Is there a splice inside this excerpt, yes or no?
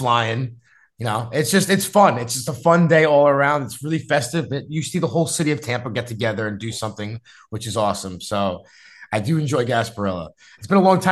no